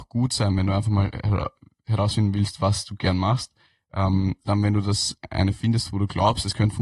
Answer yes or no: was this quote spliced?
yes